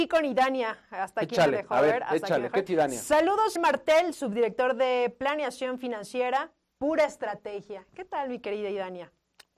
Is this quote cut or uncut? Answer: cut